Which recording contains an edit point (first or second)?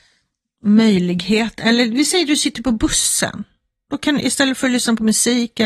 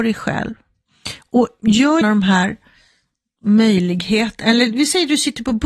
second